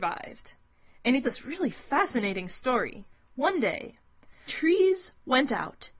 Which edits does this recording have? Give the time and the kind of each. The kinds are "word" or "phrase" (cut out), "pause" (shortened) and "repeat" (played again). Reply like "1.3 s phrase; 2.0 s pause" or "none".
1.2 s word; 4.5 s word